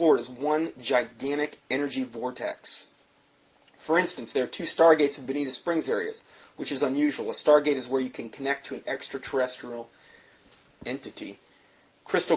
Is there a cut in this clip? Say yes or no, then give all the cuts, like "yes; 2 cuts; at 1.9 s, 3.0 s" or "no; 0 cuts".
no; 0 cuts